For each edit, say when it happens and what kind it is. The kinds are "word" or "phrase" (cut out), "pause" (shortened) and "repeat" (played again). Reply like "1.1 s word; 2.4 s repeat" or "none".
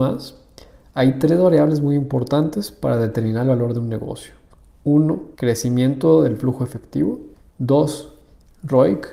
5.3 s pause; 7.3 s pause